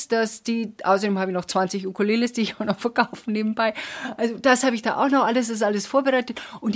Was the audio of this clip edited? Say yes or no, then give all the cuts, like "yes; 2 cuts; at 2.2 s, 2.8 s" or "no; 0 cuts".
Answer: no; 0 cuts